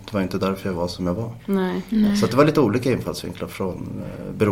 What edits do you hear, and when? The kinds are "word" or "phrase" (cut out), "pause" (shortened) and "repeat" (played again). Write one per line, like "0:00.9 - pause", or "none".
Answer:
none